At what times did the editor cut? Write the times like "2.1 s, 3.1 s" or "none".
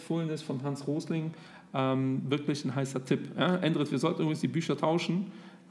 none